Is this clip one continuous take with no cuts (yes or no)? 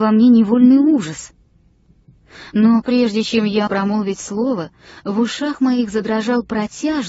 no